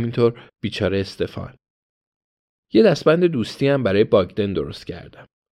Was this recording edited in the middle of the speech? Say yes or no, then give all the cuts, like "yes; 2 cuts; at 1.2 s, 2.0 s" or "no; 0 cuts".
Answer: no; 0 cuts